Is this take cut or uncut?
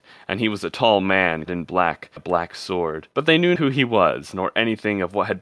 cut